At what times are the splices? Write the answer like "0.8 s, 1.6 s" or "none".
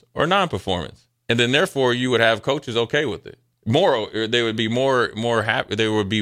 1.2 s, 3.6 s